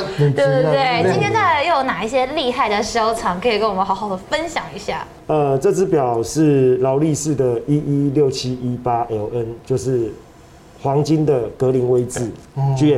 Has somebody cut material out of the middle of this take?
no; 0 cuts

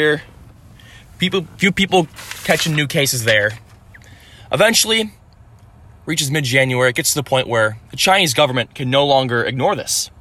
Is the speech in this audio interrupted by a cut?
yes; 1 cut; at 7.9 s

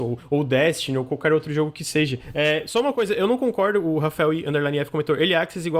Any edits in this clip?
no; 0 cuts

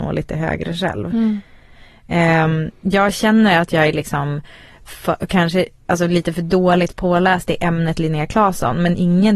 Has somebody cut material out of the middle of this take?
no; 0 cuts

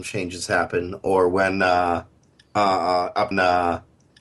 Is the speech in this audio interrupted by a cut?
yes; 1 cut; at 3.3 s

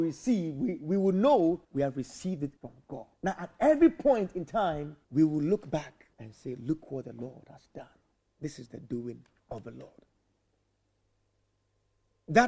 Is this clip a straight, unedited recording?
no; 6 cuts; at 1.6 s, 2.6 s, 3.1 s, 5.0 s, 6.1 s, 8.2 s

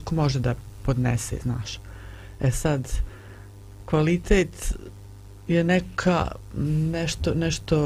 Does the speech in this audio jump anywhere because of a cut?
no; 0 cuts

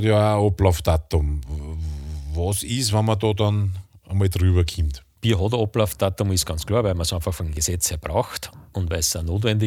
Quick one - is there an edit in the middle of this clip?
no; 0 cuts

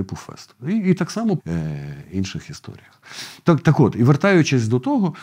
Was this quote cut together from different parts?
yes; 1 cut; at 1.4 s

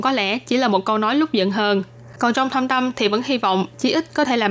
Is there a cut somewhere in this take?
no; 0 cuts

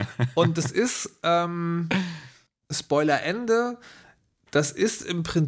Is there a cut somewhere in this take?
yes; 1 cut; at 2.5 s

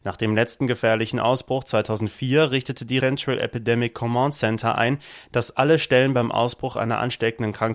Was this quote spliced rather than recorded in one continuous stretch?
yes; 1 cut; at 3.0 s

